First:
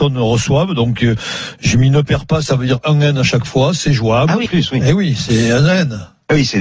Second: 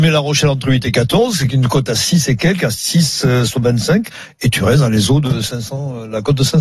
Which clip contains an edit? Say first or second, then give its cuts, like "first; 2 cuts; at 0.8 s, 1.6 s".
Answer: first; 1 cut; at 4.5 s